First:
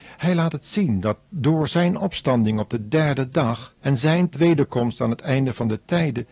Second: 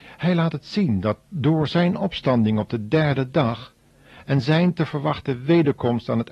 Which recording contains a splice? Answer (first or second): first